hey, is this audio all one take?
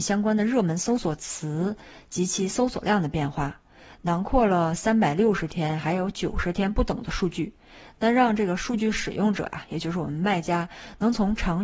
yes; 0 cuts

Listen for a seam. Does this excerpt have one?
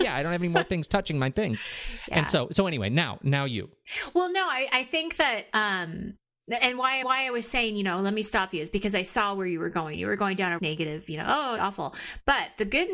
yes; 3 cuts; at 7.0 s, 10.6 s, 11.6 s

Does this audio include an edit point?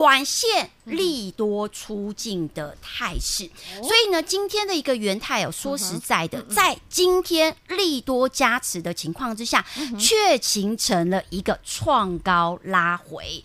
no; 0 cuts

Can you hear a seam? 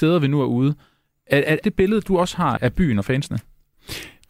yes; 2 cuts; at 1.6 s, 2.6 s

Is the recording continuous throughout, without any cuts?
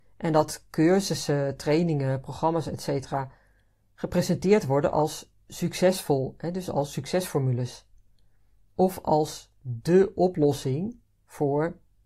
no; 1 cut; at 5.4 s

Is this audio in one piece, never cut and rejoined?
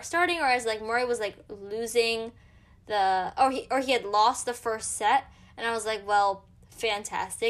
yes; 0 cuts

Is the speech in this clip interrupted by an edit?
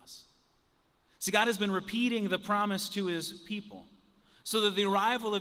no; 0 cuts

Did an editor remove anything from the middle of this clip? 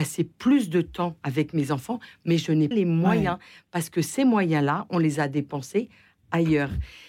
yes; 1 cut; at 2.7 s

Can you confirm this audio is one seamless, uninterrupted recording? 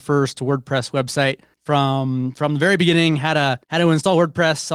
no; 2 cuts; at 1.5 s, 3.6 s

